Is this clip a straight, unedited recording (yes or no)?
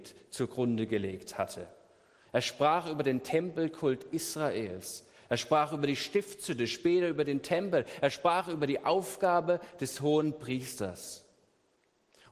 yes